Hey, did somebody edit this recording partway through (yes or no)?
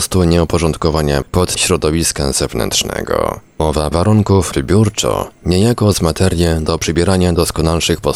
yes